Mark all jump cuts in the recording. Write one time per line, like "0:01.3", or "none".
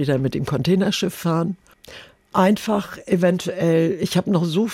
none